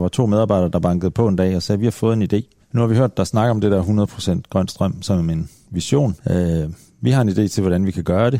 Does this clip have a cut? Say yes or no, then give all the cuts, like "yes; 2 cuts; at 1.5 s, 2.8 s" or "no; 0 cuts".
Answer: yes; 2 cuts; at 2.6 s, 6.2 s